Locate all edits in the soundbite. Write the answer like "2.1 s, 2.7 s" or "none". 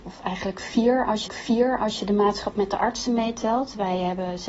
1.3 s